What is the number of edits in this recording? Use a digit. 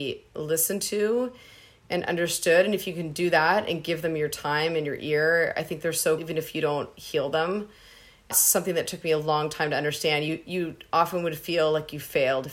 2